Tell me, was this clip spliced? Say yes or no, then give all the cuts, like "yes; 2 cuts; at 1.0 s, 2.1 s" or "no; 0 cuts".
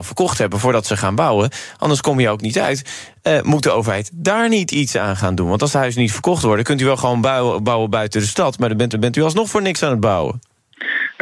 yes; 1 cut; at 8.9 s